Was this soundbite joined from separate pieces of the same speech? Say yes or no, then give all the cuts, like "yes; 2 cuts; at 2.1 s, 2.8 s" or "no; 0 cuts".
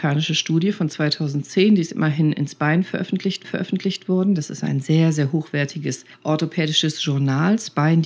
yes; 2 cuts; at 3.4 s, 6.1 s